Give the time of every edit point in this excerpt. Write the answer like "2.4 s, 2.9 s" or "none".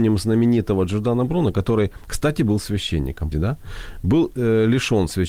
3.3 s